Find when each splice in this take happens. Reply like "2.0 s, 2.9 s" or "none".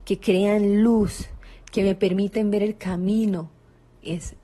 none